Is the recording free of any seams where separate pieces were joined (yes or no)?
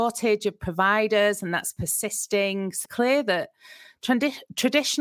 no